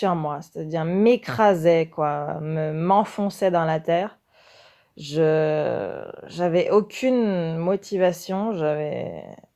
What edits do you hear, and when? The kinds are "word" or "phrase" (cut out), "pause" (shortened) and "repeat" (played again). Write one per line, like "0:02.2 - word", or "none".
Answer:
none